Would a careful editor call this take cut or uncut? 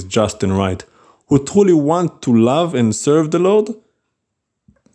uncut